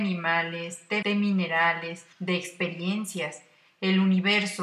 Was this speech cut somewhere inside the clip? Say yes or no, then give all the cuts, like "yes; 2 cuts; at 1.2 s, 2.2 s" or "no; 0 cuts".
yes; 2 cuts; at 1.0 s, 2.1 s